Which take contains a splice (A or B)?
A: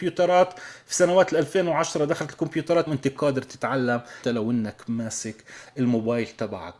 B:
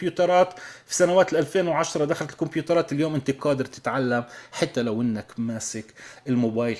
A